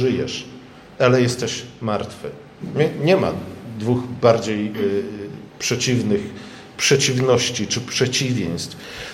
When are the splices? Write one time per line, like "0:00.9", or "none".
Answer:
0:05.5